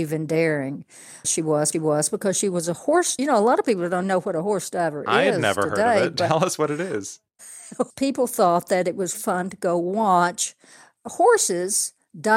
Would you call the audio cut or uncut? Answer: cut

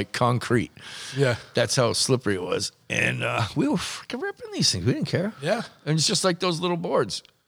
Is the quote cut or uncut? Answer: uncut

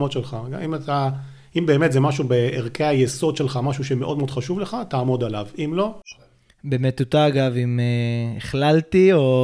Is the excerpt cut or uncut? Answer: uncut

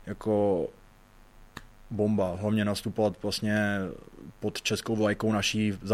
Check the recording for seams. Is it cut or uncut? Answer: uncut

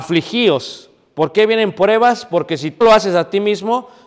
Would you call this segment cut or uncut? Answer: cut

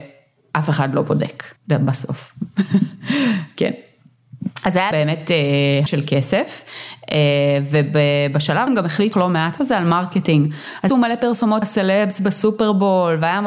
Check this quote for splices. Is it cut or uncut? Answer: cut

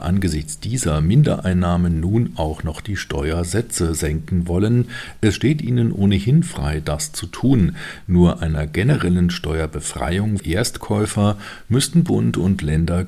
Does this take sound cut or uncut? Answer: cut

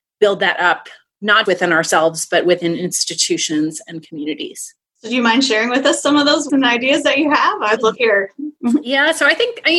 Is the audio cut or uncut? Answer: cut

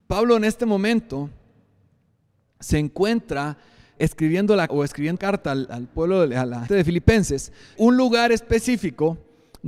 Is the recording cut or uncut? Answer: cut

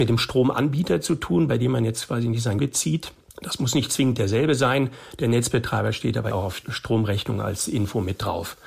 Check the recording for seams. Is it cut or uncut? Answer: cut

